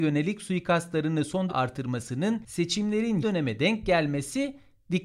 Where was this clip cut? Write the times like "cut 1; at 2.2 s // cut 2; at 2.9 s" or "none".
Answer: cut 1; at 1.5 s // cut 2; at 3.2 s

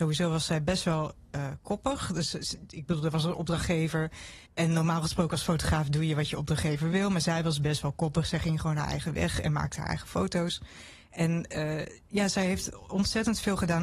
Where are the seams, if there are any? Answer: cut 1; at 4.5 s

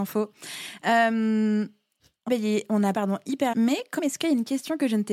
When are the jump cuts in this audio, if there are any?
cut 1; at 2.3 s // cut 2; at 2.9 s // cut 3; at 3.5 s // cut 4; at 4.0 s

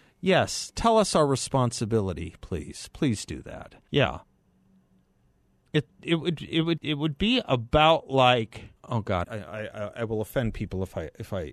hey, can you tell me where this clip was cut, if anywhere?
cut 1; at 3.9 s // cut 2; at 6.8 s // cut 3; at 8.8 s // cut 4; at 9.2 s

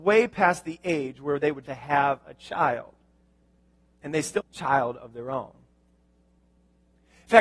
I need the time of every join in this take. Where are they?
cut 1; at 1.7 s // cut 2; at 4.4 s

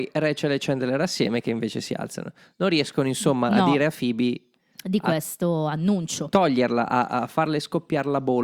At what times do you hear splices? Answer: none

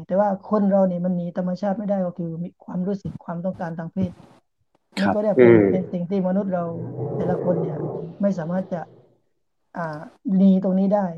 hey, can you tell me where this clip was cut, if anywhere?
none

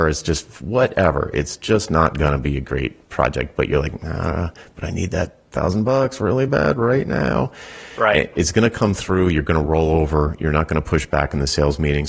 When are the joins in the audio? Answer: none

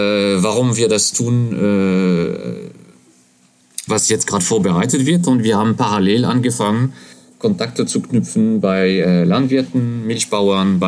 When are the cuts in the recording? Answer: cut 1; at 3.9 s

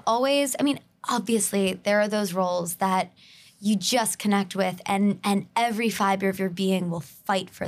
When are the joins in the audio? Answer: none

